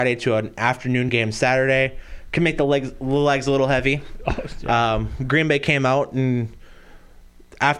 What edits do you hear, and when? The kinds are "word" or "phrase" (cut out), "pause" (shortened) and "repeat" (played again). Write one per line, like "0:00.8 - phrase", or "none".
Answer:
none